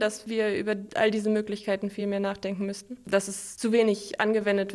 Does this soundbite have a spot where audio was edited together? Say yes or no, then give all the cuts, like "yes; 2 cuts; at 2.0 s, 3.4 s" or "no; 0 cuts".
no; 0 cuts